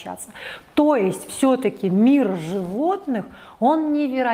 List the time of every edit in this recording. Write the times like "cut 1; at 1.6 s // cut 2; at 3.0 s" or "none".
none